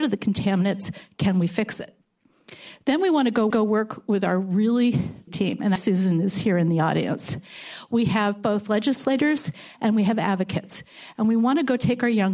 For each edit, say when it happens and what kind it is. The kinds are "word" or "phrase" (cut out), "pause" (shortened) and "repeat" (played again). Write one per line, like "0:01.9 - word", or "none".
0:03.5 - repeat
0:05.3 - phrase
0:05.8 - word